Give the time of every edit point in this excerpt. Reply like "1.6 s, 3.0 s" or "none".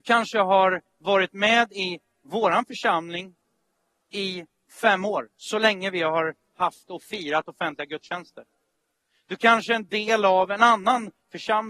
none